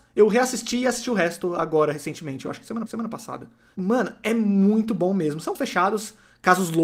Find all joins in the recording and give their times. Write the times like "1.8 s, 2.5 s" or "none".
2.9 s, 5.5 s